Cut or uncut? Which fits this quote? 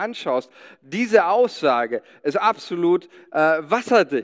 uncut